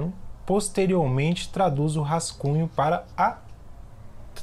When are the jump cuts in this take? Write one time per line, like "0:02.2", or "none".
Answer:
none